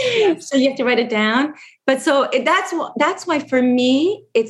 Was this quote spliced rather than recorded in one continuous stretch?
no; 0 cuts

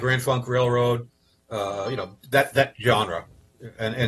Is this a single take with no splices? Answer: yes; 0 cuts

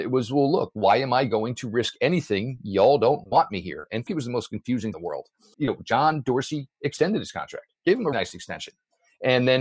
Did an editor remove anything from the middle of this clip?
yes; 4 cuts; at 4.1 s, 4.9 s, 5.5 s, 8.1 s

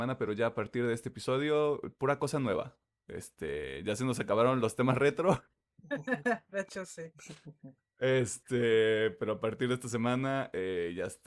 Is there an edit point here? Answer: no; 0 cuts

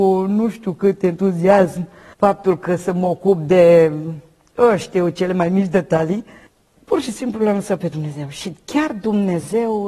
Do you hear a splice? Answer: no; 0 cuts

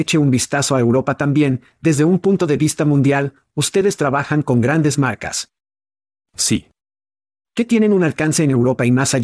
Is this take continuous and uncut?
yes; 0 cuts

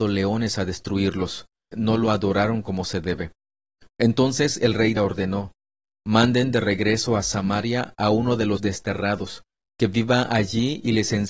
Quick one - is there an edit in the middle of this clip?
yes; 3 cuts; at 1.7 s, 5.0 s, 8.6 s

